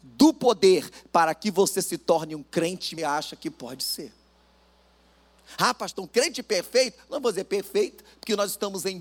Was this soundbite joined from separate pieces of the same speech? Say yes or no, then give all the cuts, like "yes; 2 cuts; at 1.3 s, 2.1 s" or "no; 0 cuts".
yes; 1 cut; at 3.0 s